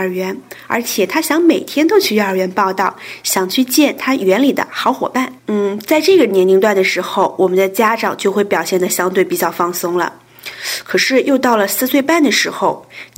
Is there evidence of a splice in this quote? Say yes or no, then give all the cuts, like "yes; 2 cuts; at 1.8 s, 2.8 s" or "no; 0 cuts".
yes; 1 cut; at 5.4 s